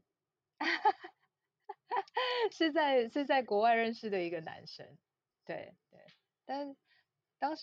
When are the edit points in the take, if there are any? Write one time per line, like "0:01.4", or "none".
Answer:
0:05.3